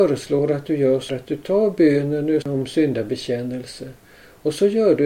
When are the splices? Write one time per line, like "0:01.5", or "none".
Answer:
0:01.1
0:02.4

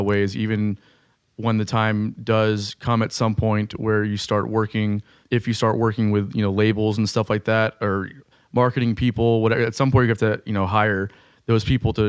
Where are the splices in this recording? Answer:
none

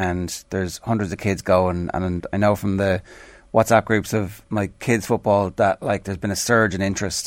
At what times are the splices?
none

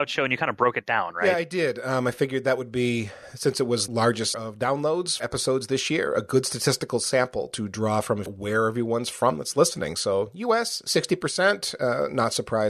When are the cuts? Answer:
0:03.9
0:04.3
0:05.2
0:08.3

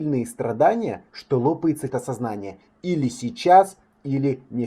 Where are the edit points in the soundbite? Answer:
0:01.1
0:01.9

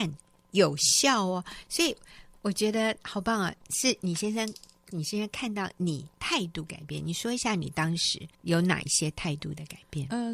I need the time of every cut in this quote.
0:04.9
0:06.1
0:08.3

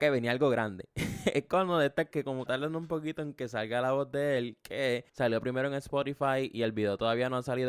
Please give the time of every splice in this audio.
0:02.1
0:02.5
0:05.1

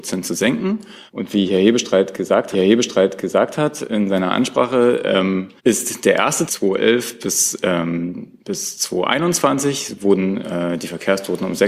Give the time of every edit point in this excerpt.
0:01.1
0:02.5
0:05.6
0:06.5
0:08.4

